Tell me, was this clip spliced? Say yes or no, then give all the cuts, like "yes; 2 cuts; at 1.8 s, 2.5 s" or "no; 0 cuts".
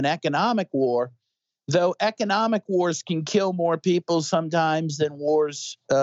no; 0 cuts